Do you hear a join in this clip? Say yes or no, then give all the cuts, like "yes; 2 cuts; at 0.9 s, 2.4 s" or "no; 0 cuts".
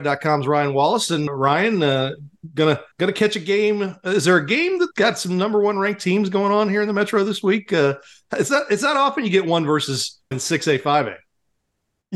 yes; 4 cuts; at 1.3 s, 2.9 s, 4.9 s, 10.3 s